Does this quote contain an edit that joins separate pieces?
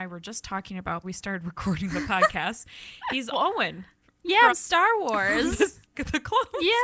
yes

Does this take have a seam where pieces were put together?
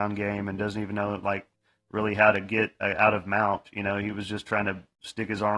no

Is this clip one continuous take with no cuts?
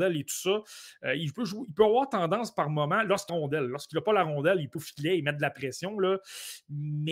no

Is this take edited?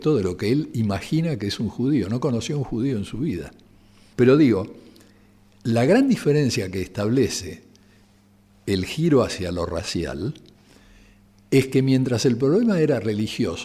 no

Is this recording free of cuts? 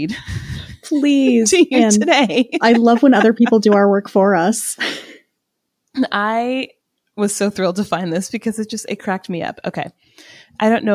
yes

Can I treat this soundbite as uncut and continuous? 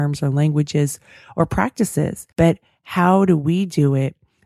no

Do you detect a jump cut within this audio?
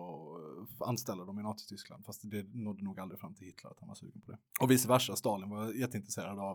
no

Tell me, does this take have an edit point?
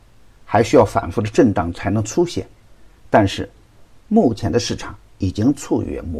no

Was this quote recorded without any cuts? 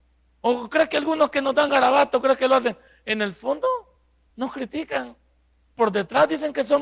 yes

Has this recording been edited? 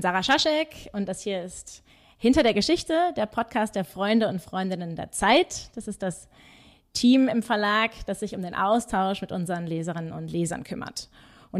no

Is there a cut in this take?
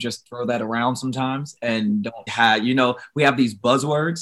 yes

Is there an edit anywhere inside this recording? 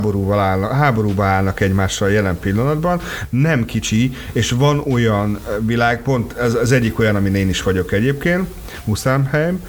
no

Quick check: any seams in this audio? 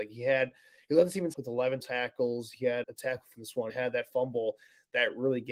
yes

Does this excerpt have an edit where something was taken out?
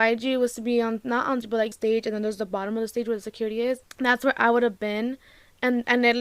yes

